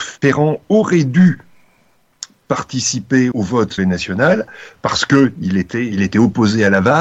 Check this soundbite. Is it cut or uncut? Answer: cut